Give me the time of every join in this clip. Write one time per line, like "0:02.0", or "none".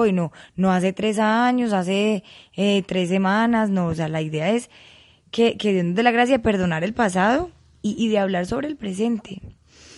none